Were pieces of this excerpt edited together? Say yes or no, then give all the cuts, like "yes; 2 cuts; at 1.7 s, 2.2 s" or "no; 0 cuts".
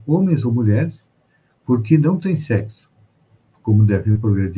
no; 0 cuts